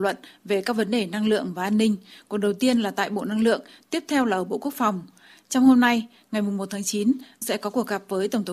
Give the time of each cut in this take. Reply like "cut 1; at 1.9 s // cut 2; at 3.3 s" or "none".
cut 1; at 7.4 s